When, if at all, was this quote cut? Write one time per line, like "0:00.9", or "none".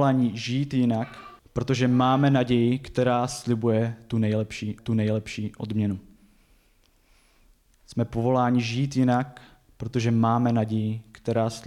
0:01.4
0:04.8